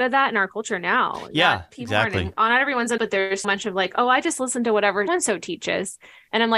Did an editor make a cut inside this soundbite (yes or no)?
yes